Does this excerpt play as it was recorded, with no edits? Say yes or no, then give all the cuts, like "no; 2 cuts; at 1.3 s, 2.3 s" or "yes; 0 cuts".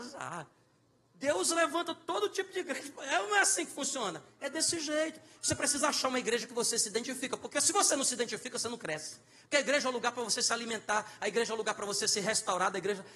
yes; 0 cuts